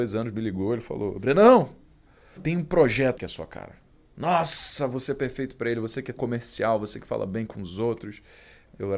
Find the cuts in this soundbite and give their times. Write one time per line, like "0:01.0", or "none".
0:02.4
0:03.2
0:06.2